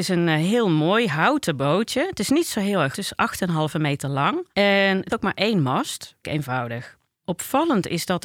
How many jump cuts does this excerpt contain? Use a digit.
4